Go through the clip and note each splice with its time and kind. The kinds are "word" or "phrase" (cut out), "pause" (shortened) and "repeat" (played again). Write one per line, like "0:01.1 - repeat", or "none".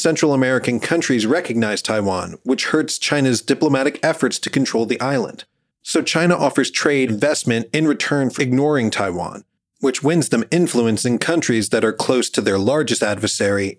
0:07.1 - word
0:08.4 - word